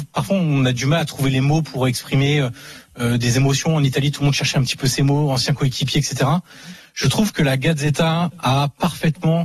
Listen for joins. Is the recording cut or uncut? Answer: uncut